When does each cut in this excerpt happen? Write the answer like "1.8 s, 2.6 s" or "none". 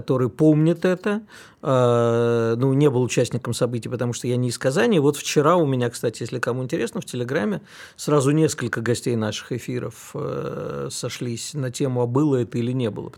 none